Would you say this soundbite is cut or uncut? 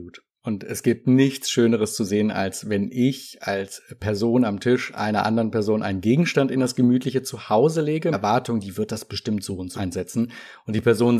cut